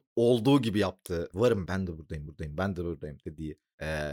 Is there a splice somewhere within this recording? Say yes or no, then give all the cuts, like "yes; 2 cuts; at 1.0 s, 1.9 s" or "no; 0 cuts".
yes; 3 cuts; at 1.3 s, 1.6 s, 2.3 s